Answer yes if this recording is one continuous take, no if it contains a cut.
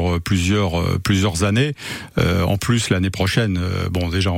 yes